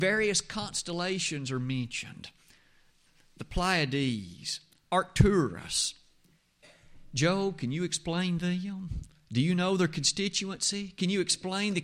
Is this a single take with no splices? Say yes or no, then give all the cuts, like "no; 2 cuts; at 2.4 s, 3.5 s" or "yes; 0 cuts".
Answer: yes; 0 cuts